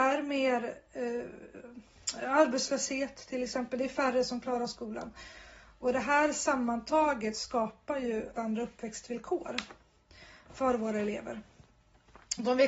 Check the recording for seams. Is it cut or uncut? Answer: cut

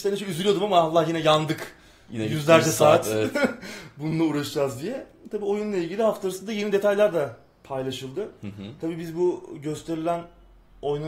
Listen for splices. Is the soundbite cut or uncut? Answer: uncut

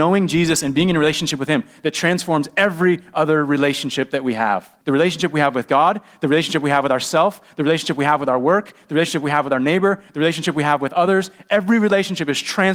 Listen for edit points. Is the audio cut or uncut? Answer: cut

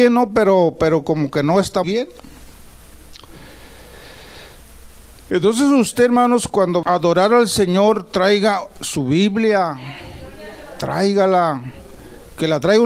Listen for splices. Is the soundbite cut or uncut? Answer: cut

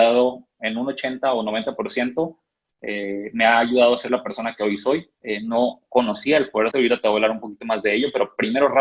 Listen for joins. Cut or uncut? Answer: cut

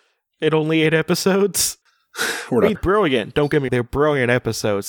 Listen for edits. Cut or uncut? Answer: cut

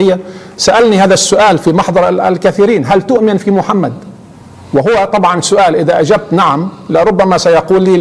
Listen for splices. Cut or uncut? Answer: uncut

